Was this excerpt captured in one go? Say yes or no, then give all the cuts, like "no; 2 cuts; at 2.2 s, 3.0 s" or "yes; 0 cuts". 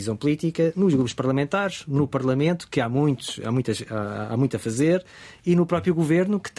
yes; 0 cuts